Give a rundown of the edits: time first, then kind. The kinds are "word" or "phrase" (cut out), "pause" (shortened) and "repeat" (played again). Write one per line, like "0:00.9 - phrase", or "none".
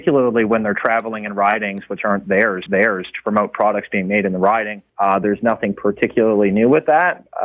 0:02.7 - repeat
0:04.9 - pause